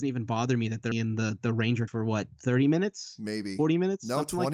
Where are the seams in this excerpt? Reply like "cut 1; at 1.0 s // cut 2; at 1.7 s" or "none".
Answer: cut 1; at 0.9 s // cut 2; at 1.9 s